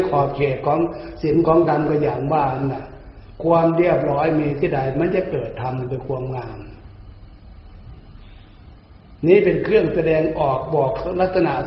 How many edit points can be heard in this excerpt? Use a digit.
1